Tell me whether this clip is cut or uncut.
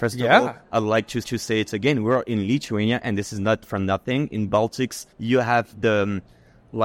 cut